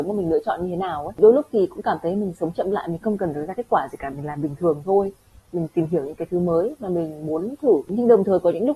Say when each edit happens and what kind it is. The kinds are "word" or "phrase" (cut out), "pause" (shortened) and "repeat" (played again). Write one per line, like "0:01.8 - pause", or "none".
none